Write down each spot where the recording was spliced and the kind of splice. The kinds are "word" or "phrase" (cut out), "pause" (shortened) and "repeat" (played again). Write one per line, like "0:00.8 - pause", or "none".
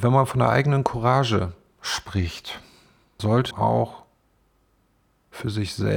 0:03.2 - word
0:03.5 - word